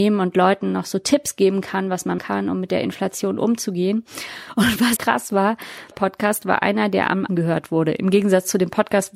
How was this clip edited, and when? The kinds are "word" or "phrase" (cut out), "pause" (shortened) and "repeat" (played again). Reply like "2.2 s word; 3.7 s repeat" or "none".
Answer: 2.2 s word; 5.0 s word; 5.9 s word; 7.3 s word